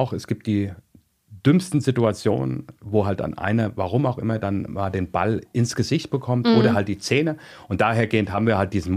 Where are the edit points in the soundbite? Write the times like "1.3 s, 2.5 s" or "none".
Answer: none